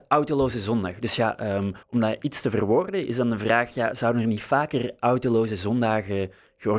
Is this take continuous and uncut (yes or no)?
no